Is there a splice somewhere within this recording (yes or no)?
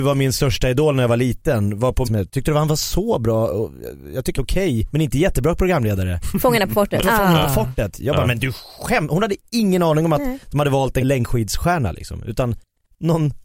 yes